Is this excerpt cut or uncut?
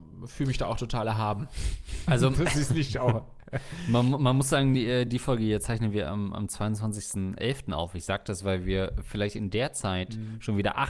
uncut